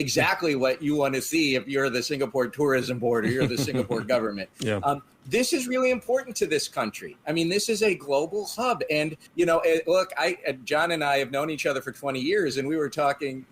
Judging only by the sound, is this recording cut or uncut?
cut